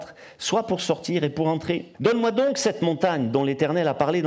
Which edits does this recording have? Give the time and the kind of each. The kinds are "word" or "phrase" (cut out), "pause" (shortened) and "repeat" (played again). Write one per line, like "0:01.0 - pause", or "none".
0:01.9 - pause